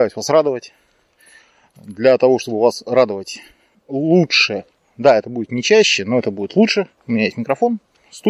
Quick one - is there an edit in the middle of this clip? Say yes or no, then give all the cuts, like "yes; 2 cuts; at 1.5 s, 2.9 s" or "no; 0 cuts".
no; 0 cuts